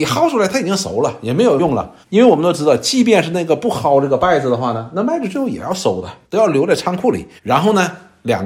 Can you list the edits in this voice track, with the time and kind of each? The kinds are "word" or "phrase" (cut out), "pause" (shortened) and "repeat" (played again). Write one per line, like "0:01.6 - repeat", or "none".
0:02.0 - pause
0:06.2 - pause
0:07.4 - pause